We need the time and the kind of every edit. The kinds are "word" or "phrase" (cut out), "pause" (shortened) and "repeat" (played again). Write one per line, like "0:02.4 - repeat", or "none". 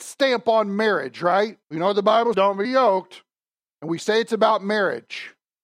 0:01.6 - pause
0:02.3 - word
0:02.6 - word

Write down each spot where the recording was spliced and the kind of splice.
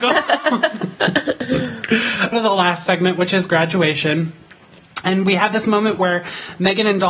0:02.3 - phrase

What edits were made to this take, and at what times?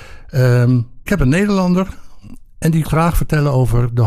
0:01.1 - word
0:02.8 - word

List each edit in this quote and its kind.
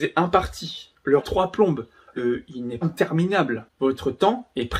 0:01.2 - phrase
0:02.2 - phrase
0:02.8 - word

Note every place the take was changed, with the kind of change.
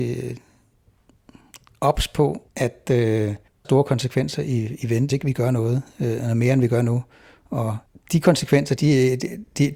0:02.5 - pause
0:03.6 - phrase
0:05.1 - word
0:08.8 - word

